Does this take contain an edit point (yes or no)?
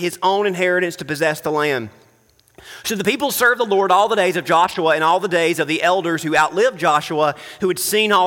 no